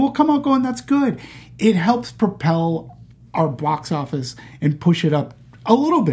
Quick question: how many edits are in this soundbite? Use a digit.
0